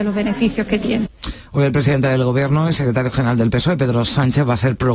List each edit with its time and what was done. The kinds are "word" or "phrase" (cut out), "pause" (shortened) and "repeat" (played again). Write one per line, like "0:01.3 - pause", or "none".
none